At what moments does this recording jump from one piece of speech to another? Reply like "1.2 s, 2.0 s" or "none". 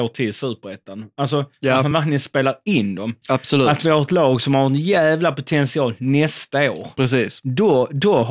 none

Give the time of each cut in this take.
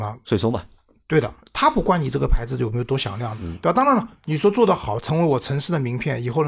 1.4 s

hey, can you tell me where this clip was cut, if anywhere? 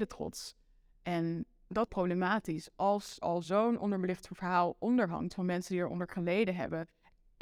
1.9 s, 3.2 s

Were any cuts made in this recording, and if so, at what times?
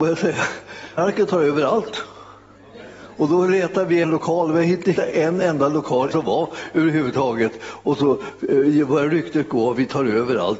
1.0 s, 4.0 s, 5.0 s, 6.1 s

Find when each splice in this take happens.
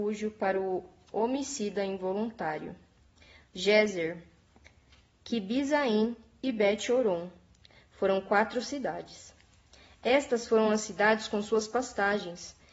none

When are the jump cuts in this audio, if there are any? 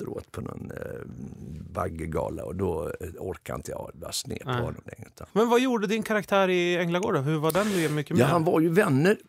5.3 s

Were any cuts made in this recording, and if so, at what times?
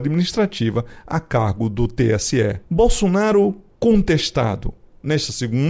none

